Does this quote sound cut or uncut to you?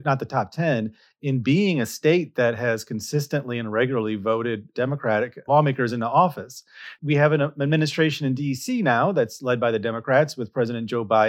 uncut